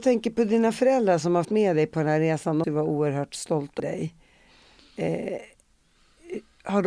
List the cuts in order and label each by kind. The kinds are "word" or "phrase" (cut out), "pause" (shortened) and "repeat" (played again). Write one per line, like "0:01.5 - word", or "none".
0:01.4 - word
0:02.6 - word
0:03.8 - word